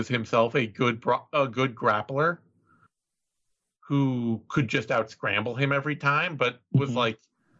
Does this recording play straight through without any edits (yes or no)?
yes